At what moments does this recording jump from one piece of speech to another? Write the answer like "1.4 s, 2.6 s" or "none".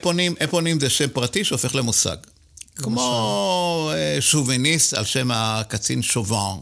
none